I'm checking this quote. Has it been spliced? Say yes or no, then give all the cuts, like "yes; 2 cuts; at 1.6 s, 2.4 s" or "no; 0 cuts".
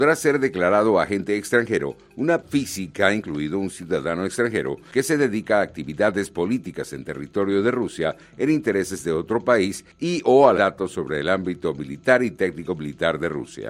yes; 2 cuts; at 2.4 s, 10.6 s